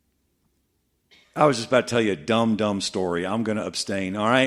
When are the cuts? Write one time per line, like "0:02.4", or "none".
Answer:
none